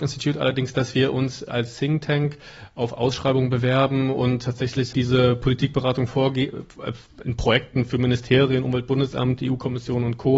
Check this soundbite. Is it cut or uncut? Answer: cut